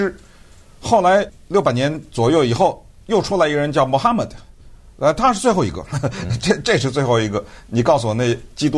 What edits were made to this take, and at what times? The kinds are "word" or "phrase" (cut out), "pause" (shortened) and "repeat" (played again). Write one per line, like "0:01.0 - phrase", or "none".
none